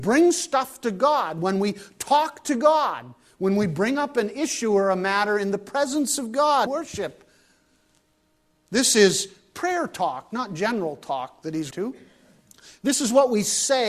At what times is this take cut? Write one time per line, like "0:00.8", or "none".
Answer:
0:06.7
0:11.7